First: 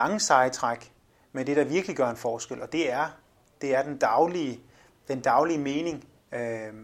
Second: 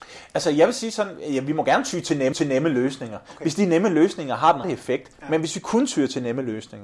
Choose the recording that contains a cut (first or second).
second